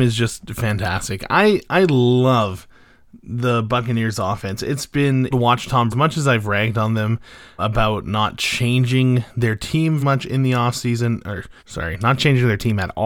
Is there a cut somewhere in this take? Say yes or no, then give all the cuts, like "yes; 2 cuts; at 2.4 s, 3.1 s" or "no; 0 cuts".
yes; 5 cuts; at 5.3 s, 5.9 s, 7.6 s, 10.0 s, 11.6 s